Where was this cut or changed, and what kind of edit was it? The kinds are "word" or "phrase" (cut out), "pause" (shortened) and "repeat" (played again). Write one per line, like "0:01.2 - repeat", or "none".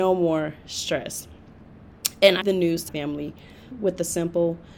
0:02.4 - word
0:02.9 - word
0:03.7 - word